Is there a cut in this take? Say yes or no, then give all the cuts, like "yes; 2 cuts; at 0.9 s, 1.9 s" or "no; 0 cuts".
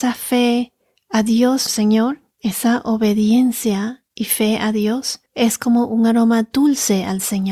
yes; 3 cuts; at 1.7 s, 4.1 s, 5.3 s